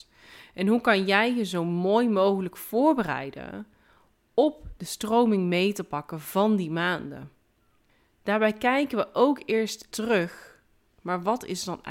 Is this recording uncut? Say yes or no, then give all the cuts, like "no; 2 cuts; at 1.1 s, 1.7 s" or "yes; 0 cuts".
no; 1 cut; at 9.9 s